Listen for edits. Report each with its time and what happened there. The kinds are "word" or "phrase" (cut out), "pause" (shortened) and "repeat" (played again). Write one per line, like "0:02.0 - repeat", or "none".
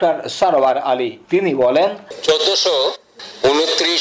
none

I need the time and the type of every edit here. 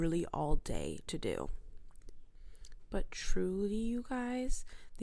none

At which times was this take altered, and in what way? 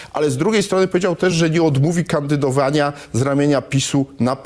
none

